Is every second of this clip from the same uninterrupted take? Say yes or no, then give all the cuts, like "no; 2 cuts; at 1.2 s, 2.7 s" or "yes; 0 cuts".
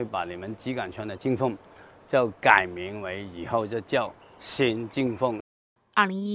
yes; 0 cuts